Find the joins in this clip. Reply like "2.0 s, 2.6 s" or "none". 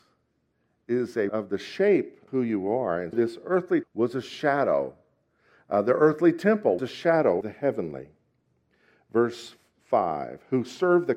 1.3 s, 2.3 s, 3.1 s, 3.8 s, 6.8 s, 7.4 s